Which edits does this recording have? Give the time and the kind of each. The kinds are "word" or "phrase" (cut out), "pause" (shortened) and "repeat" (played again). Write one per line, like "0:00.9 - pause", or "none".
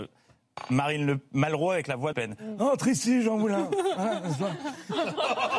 0:02.1 - phrase